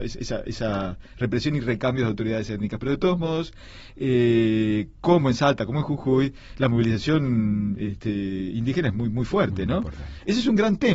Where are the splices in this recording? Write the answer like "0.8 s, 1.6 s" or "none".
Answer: none